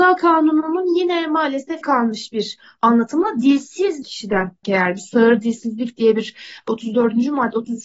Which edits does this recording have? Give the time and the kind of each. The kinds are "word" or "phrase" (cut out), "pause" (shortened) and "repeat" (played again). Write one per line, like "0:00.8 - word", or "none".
0:01.8 - word
0:04.0 - word
0:04.6 - word